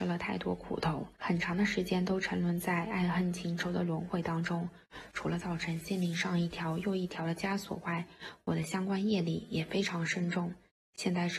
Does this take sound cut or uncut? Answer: cut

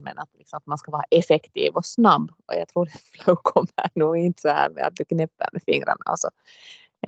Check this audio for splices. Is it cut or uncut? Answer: uncut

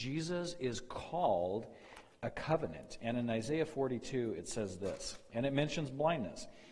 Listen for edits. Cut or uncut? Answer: uncut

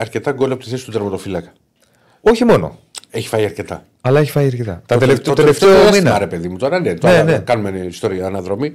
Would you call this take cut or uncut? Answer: uncut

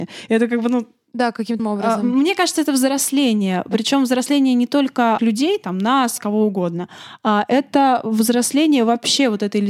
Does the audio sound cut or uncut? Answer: cut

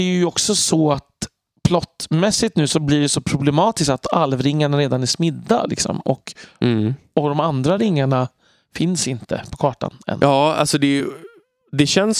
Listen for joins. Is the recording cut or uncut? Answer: uncut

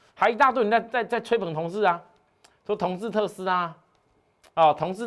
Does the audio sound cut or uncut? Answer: uncut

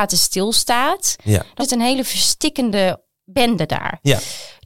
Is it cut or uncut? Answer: cut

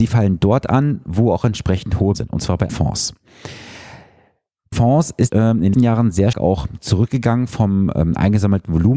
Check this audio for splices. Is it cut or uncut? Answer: cut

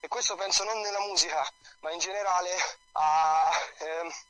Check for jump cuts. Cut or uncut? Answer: cut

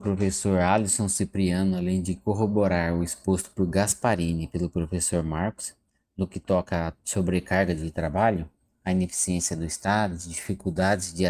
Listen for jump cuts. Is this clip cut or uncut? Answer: uncut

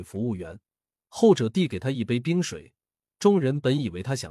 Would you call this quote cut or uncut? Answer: uncut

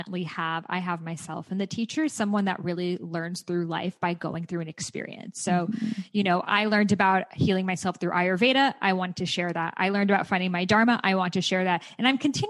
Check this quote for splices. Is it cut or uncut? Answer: uncut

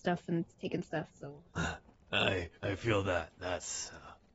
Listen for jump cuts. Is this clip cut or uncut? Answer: cut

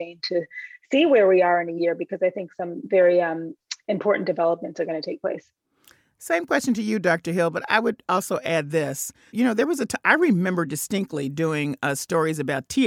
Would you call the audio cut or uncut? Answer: uncut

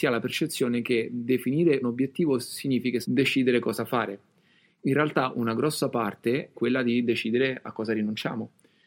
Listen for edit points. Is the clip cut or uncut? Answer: cut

